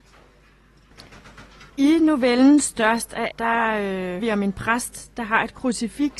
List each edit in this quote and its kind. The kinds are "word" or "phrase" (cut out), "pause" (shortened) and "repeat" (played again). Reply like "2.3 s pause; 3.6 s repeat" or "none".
1.7 s pause; 3.3 s word; 4.2 s word